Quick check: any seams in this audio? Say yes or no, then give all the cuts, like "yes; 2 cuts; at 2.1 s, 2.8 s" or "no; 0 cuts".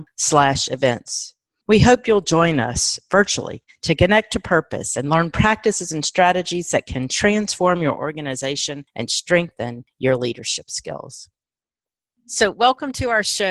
no; 0 cuts